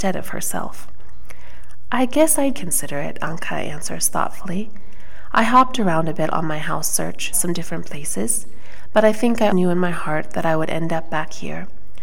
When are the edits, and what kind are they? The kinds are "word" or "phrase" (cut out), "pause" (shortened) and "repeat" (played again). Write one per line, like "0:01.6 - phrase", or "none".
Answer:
0:02.5 - word
0:07.3 - word
0:09.5 - word